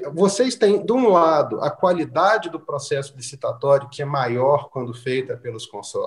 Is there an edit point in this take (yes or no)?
yes